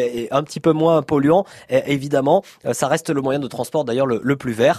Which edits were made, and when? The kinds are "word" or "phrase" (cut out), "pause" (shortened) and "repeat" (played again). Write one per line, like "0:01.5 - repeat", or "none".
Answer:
none